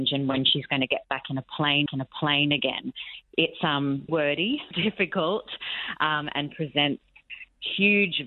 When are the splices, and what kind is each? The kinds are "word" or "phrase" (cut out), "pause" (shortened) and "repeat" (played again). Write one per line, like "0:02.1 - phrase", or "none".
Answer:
0:01.9 - repeat
0:04.1 - word
0:04.7 - word

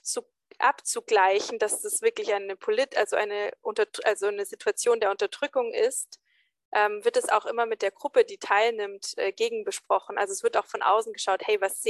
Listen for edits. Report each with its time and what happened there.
none

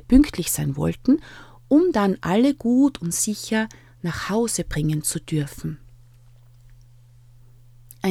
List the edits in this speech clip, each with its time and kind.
none

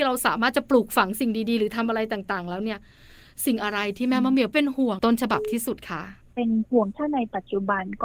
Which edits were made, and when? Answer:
0:06.2 - pause

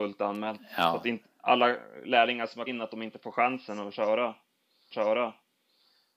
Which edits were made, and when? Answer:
0:02.7 - word
0:04.9 - repeat

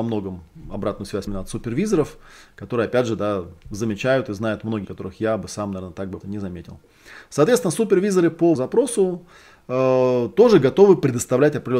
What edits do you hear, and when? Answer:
0:01.3 - word
0:04.8 - word
0:06.2 - word
0:08.6 - word

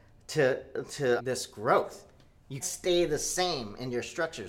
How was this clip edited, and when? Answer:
0:01.2 - word
0:02.6 - word

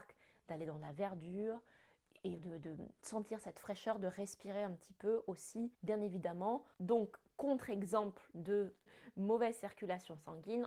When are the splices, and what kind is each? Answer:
0:02.4 - word
0:05.7 - pause
0:06.7 - pause
0:08.9 - word

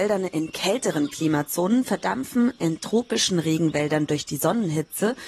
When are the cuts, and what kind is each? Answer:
none

